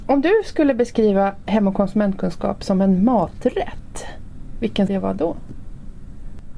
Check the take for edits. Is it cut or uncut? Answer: cut